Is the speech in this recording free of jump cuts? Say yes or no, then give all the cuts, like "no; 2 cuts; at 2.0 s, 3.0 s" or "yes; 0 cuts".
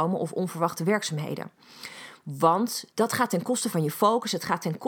no; 1 cut; at 2.9 s